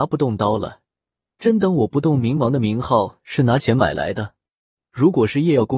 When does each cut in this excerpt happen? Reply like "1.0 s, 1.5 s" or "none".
none